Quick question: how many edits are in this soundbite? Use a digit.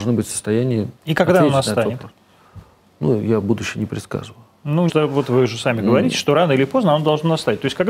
2